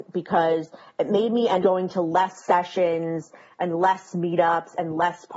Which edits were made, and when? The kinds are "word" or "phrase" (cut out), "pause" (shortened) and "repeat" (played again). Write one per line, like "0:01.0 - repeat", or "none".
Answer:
0:01.6 - word